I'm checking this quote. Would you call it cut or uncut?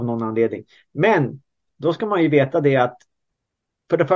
uncut